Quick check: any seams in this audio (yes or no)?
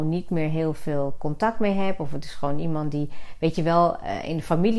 no